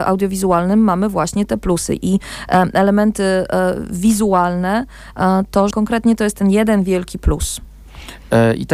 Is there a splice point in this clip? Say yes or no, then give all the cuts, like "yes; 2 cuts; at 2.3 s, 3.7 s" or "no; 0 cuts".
yes; 1 cut; at 5.7 s